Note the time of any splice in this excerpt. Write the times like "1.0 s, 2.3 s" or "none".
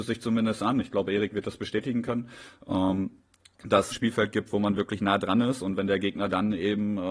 3.9 s